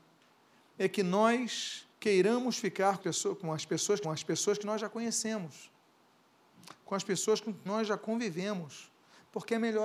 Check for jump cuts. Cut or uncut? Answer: cut